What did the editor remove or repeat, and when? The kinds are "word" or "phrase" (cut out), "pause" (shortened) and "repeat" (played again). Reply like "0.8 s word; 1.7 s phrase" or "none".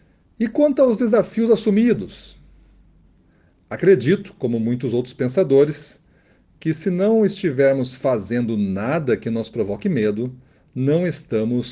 none